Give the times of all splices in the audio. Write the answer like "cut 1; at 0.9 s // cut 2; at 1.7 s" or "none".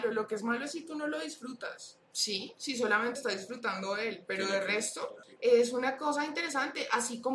cut 1; at 2.0 s // cut 2; at 3.2 s